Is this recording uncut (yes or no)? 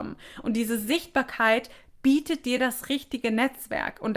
yes